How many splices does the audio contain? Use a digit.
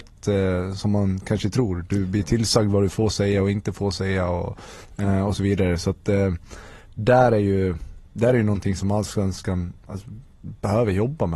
0